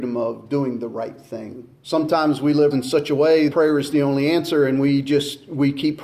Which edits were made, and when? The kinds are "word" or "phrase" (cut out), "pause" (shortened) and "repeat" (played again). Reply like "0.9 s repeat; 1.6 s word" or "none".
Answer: 1.8 s pause; 2.7 s phrase; 3.5 s phrase